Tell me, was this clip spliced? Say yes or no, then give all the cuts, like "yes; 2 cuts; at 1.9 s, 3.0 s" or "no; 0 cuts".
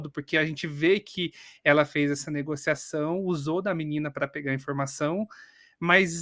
no; 0 cuts